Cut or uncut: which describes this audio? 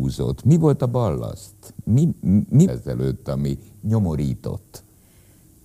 cut